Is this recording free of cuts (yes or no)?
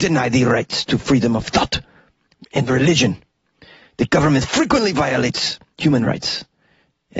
yes